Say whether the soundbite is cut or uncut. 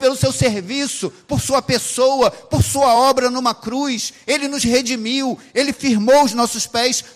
uncut